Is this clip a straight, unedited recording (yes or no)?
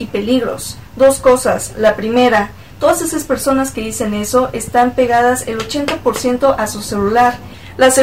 yes